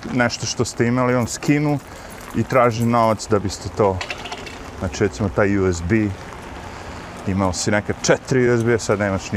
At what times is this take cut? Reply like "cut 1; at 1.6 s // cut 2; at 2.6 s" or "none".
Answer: none